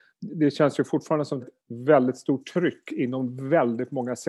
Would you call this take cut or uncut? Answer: cut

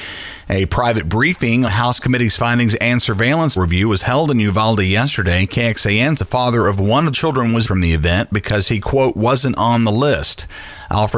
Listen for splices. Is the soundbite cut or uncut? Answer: cut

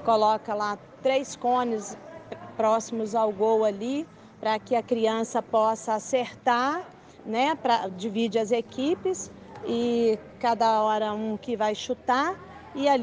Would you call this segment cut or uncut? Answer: cut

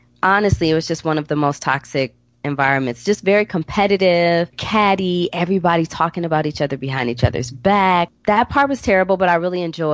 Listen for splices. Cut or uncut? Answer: cut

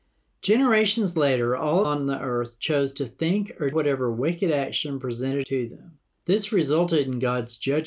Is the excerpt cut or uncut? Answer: cut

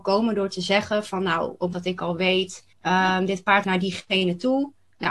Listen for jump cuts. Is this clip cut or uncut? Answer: cut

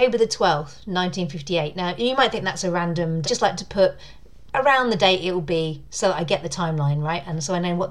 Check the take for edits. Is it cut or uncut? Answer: cut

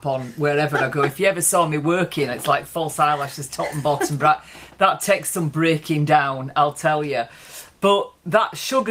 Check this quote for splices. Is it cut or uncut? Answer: uncut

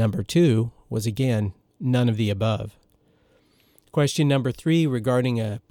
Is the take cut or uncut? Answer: uncut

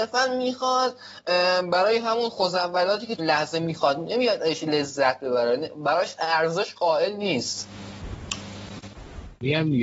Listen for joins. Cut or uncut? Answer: cut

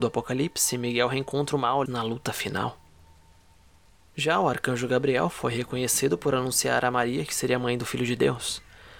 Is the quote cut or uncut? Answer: cut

